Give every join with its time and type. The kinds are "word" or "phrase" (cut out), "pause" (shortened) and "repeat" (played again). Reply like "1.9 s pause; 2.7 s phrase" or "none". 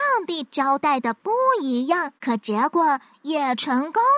2.2 s pause